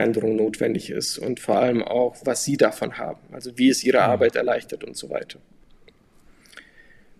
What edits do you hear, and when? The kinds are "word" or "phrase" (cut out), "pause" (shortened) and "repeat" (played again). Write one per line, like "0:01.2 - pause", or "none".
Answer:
none